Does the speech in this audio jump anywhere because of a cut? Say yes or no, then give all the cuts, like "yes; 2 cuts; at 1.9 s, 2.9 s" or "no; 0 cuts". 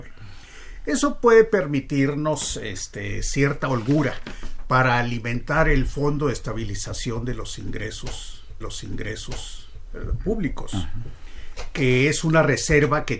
yes; 1 cut; at 8.6 s